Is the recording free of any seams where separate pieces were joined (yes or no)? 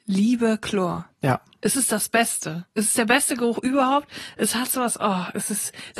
yes